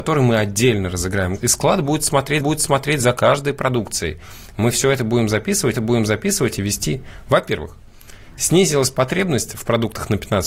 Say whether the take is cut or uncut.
cut